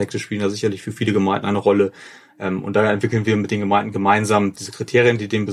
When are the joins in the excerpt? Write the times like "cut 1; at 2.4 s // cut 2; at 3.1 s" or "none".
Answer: none